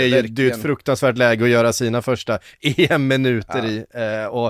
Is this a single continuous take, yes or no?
yes